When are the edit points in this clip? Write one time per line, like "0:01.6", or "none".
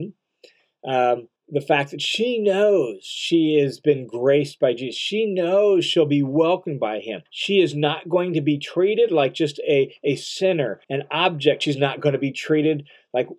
0:01.4
0:07.3
0:10.8